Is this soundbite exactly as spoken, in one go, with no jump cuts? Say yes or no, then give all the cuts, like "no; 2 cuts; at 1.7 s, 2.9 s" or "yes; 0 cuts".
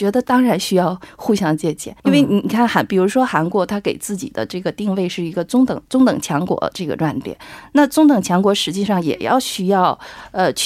no; 2 cuts; at 2.0 s, 5.9 s